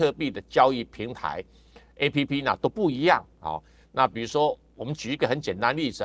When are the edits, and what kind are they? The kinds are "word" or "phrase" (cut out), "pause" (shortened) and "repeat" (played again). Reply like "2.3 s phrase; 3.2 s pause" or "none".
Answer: none